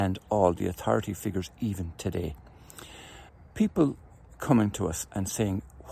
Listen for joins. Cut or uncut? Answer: cut